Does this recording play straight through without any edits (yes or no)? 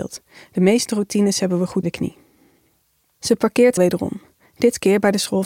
no